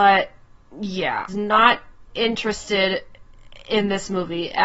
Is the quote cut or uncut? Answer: cut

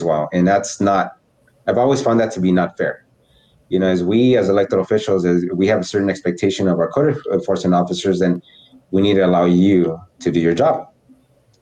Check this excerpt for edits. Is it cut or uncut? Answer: uncut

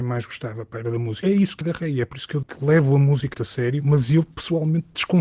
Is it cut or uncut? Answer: cut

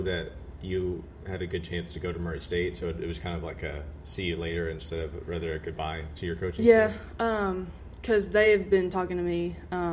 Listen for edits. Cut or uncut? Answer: uncut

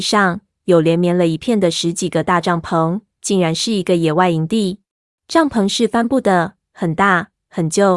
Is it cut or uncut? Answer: cut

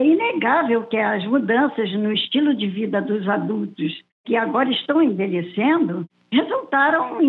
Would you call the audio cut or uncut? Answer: uncut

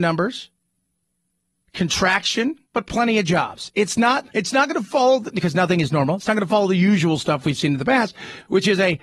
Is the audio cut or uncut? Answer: cut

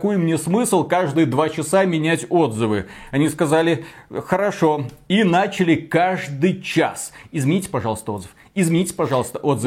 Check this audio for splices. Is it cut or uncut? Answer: uncut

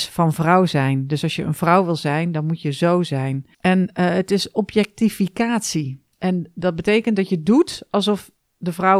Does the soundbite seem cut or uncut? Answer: cut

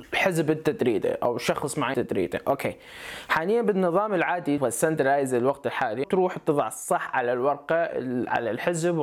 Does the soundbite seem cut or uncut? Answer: cut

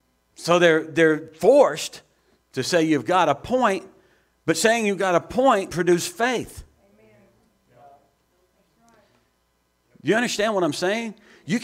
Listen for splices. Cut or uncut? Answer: cut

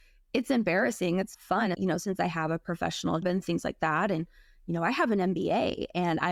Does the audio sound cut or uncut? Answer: cut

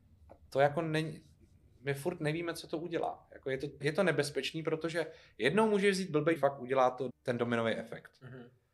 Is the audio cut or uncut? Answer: cut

